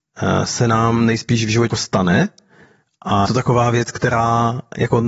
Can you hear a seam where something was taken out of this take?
yes; 2 cuts; at 1.7 s, 3.2 s

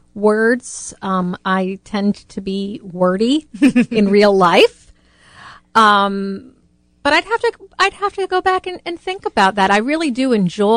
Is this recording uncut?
yes; 0 cuts

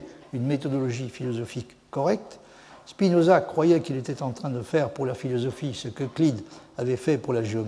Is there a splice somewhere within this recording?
no; 0 cuts

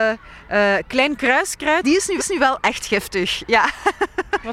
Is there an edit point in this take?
yes; 2 cuts; at 1.8 s, 2.2 s

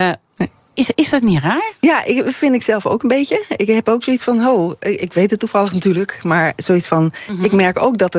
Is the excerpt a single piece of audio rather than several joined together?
yes; 0 cuts

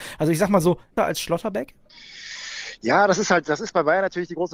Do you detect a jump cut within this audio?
yes; 1 cut; at 1.0 s

